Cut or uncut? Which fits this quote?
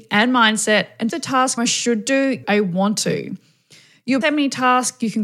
cut